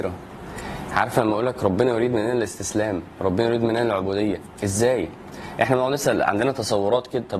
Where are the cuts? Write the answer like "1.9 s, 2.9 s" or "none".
none